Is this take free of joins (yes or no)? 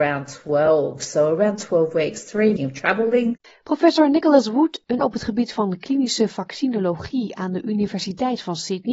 no